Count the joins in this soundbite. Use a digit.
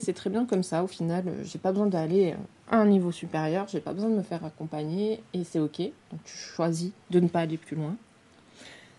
1